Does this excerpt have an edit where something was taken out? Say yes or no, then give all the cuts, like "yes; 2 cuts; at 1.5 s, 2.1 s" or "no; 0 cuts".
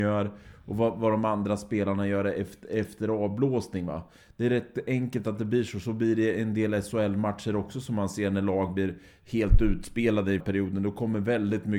yes; 1 cut; at 10.4 s